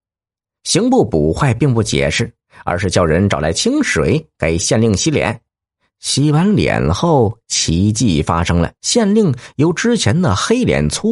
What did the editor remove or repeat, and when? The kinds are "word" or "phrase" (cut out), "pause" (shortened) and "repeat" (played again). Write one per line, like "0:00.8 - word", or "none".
0:05.5 - pause
0:08.8 - pause